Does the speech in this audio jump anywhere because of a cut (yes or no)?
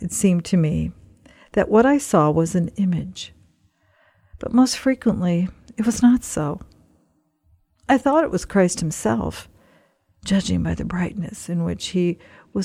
no